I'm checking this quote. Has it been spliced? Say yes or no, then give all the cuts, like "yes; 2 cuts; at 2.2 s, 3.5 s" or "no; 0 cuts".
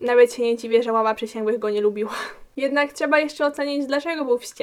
no; 0 cuts